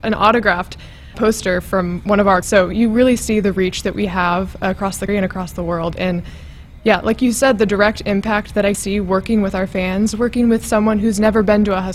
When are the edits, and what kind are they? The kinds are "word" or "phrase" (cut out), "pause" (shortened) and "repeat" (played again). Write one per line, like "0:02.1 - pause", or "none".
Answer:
0:01.1 - word
0:02.4 - word
0:05.1 - word
0:08.7 - word